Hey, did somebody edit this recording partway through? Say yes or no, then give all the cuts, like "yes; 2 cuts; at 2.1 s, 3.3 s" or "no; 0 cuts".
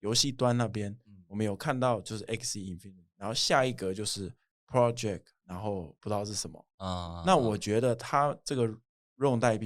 no; 0 cuts